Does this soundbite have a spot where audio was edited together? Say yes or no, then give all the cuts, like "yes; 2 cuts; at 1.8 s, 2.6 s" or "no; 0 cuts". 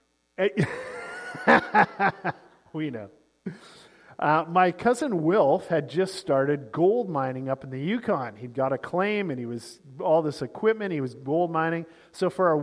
no; 0 cuts